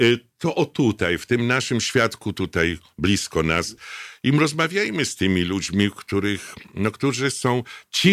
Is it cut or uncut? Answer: uncut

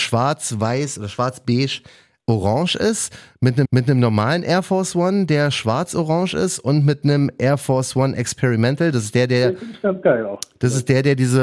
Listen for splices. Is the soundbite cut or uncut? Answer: cut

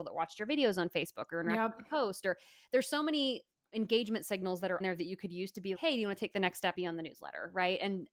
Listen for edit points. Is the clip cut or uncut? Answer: cut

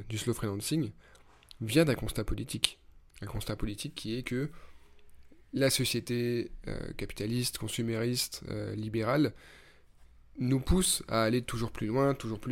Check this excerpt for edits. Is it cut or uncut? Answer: uncut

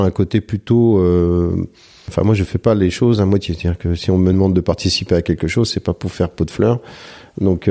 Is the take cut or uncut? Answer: uncut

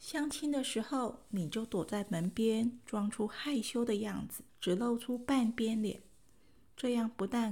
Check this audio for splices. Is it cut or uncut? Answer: cut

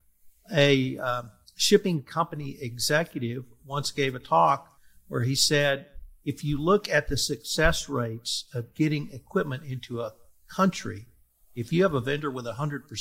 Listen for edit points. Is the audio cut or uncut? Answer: uncut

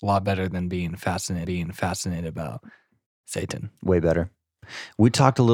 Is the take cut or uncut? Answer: cut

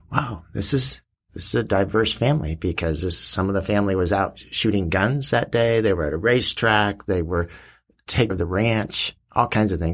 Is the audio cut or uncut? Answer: cut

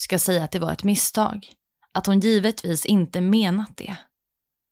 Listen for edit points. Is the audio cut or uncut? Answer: uncut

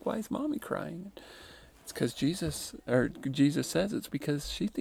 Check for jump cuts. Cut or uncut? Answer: cut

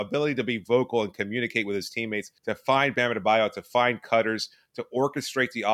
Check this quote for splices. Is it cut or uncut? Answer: cut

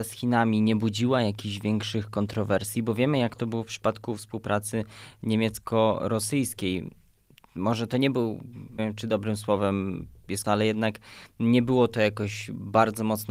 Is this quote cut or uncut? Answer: cut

